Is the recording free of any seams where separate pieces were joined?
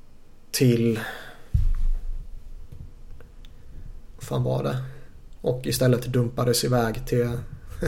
no; 1 cut; at 4.1 s

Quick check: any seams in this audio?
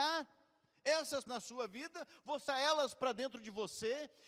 yes; 2 cuts; at 1.3 s, 2.5 s

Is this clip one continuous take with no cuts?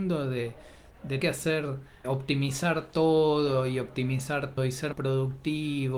no; 4 cuts; at 1.2 s, 2.0 s, 4.6 s, 4.9 s

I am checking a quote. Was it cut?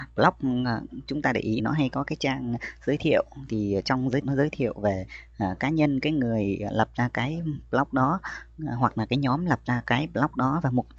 yes; 2 cuts; at 1.6 s, 4.2 s

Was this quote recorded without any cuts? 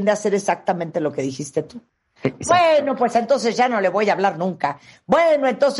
yes; 0 cuts

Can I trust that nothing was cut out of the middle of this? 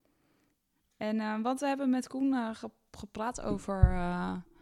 yes; 0 cuts

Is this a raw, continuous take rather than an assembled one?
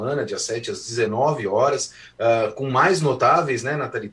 yes; 0 cuts

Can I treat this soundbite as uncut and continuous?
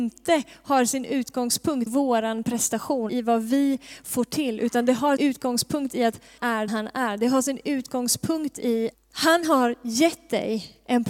no; 6 cuts; at 1.9 s, 3.1 s, 5.2 s, 6.4 s, 6.7 s, 8.9 s

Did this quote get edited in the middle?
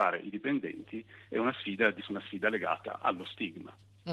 yes; 1 cut; at 2.0 s

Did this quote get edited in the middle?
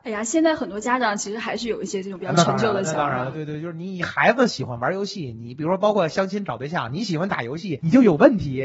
no; 0 cuts

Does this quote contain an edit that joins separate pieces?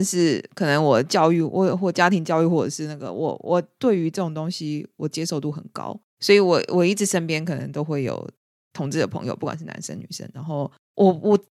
yes; 2 cuts; at 6.1 s, 8.5 s

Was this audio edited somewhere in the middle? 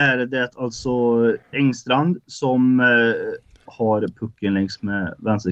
yes; 2 cuts; at 1.5 s, 3.7 s

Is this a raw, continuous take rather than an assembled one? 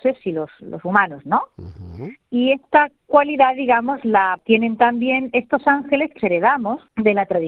no; 1 cut; at 6.2 s

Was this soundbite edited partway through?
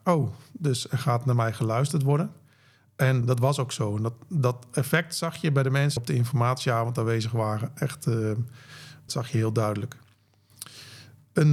yes; 3 cuts; at 3.2 s, 6.0 s, 9.1 s

